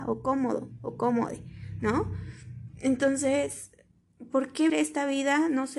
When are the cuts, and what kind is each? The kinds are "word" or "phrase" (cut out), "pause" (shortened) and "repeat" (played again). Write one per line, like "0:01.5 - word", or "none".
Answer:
0:04.7 - word